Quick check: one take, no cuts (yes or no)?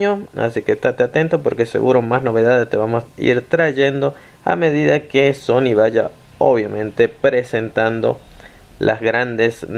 yes